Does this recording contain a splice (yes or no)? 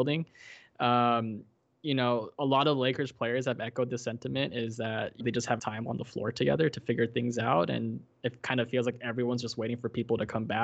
yes